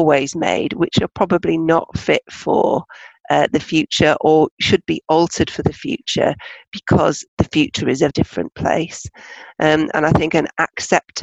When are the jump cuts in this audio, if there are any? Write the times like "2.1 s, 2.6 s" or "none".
7.3 s, 8.1 s